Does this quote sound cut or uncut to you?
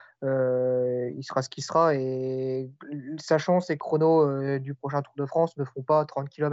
cut